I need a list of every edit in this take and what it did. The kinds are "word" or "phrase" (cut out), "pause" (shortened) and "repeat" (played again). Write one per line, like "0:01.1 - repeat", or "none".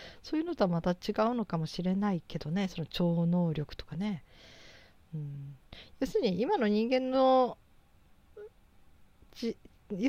none

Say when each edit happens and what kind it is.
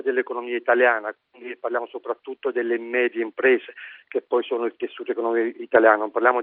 none

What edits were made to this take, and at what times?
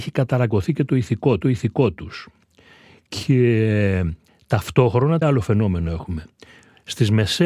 0:01.4 - repeat
0:05.2 - word

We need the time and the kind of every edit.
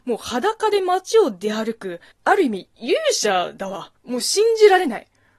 0:02.1 - pause
0:04.0 - pause

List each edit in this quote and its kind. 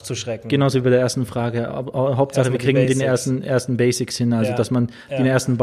none

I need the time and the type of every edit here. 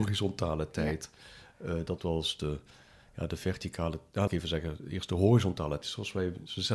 0:02.0 - word
0:04.3 - word
0:05.8 - word

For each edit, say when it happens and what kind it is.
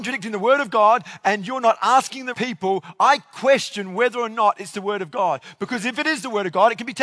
0:02.3 - word

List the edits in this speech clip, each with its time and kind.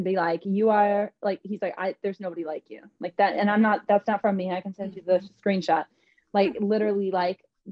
none

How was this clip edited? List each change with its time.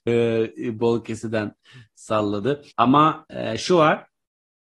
0:02.7 - pause

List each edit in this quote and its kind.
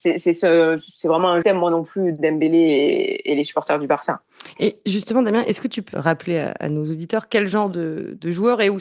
0:01.4 - word
0:05.9 - word

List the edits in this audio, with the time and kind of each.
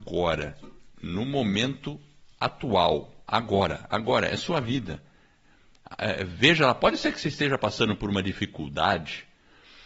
none

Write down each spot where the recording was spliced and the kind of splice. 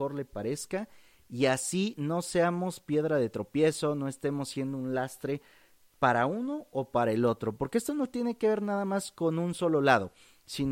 none

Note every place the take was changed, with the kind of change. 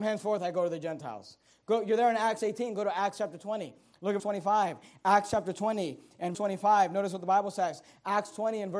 0:04.2 - word
0:06.3 - word

